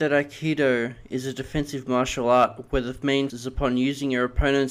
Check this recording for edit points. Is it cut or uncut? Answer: cut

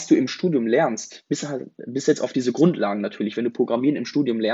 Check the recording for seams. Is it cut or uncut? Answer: uncut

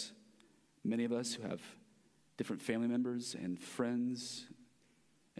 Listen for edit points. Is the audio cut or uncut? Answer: uncut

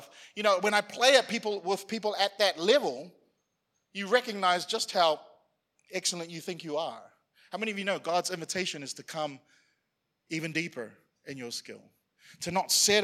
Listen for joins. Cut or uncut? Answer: uncut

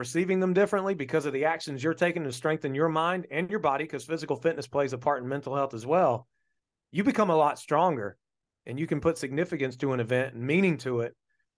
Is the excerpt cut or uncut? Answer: uncut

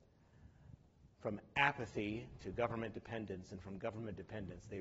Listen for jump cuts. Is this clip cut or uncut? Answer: uncut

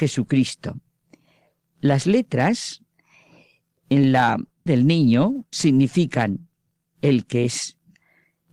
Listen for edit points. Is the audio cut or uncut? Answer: cut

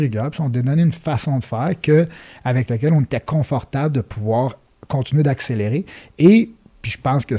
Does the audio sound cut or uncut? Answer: uncut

